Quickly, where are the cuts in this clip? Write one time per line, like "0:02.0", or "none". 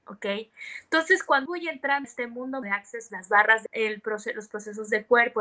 0:01.5
0:02.0
0:02.6
0:03.1
0:03.7